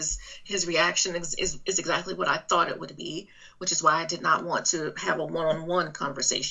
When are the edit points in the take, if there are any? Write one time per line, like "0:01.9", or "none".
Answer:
none

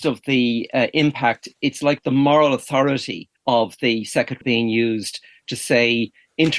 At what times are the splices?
0:01.5
0:03.4
0:04.4

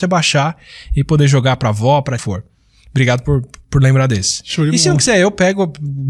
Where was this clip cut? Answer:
0:02.2

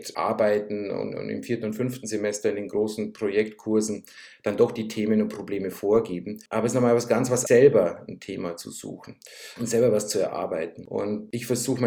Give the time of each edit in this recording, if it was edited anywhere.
0:07.5

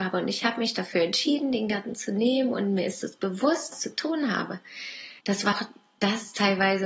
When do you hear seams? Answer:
0:03.7
0:05.2
0:05.5

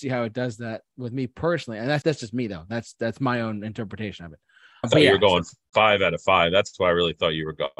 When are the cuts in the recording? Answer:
0:02.0
0:04.8

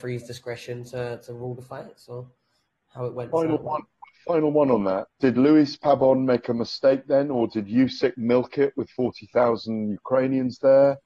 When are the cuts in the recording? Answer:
0:05.1

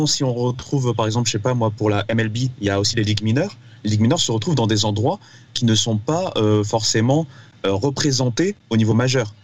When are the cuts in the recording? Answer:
none

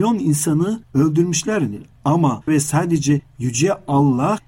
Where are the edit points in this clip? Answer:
0:02.5

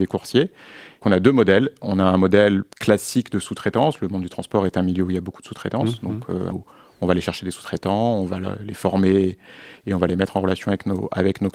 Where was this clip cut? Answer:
0:01.0
0:02.7
0:06.5

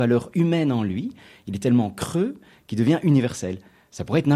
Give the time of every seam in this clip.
none

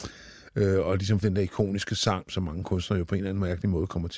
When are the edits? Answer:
0:01.2
0:02.3

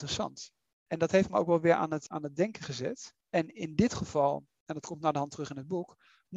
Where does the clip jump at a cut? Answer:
0:03.2

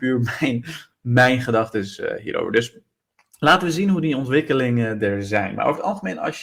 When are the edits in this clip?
none

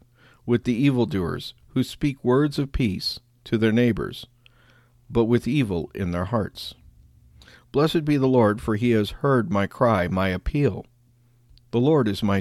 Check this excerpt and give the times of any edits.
none

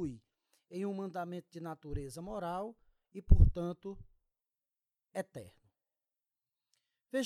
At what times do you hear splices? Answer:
none

